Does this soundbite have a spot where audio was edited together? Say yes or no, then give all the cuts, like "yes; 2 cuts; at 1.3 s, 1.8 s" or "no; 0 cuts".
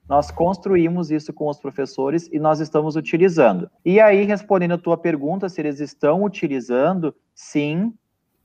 yes; 1 cut; at 3.8 s